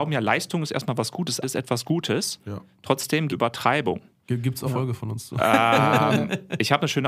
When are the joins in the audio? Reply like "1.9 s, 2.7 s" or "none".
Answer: 1.4 s, 3.3 s, 4.6 s

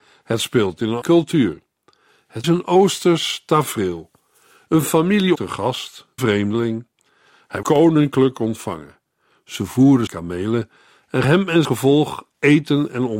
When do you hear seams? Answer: 1.0 s, 2.4 s, 5.3 s, 6.2 s, 7.6 s, 10.1 s, 11.2 s, 11.6 s

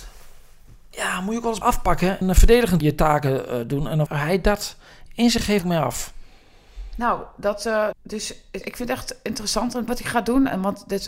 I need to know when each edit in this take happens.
1.6 s, 2.2 s, 2.8 s, 4.1 s, 5.6 s, 7.9 s, 8.6 s, 9.9 s

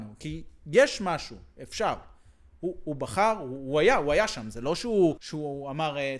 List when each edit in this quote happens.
5.2 s

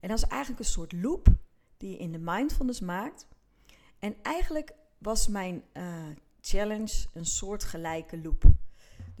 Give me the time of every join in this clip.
none

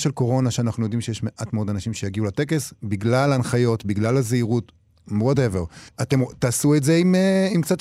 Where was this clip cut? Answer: 5.9 s

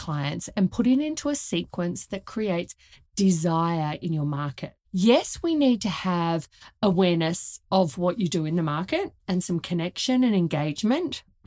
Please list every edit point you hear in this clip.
4.8 s

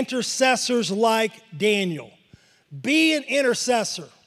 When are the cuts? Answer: none

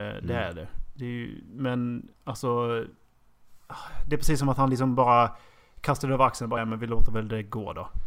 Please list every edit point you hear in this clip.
2.2 s, 6.6 s

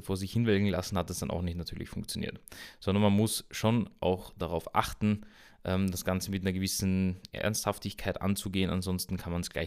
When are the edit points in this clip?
none

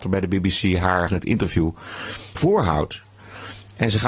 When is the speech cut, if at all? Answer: 1.1 s, 2.3 s

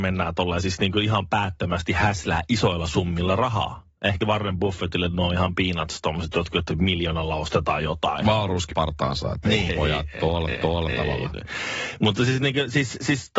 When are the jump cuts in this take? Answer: 4.2 s, 8.7 s, 9.7 s, 10.5 s

